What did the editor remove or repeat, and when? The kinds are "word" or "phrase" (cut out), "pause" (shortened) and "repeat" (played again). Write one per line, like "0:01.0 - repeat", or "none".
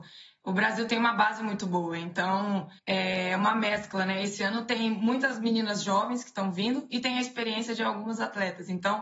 0:02.8 - pause